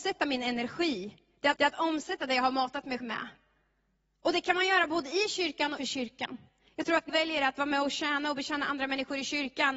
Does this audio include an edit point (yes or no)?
yes